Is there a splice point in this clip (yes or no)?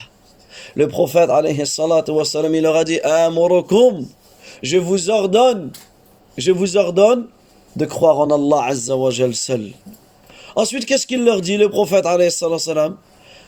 no